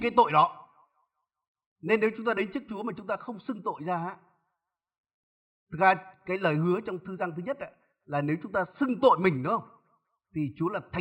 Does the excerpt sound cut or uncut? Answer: uncut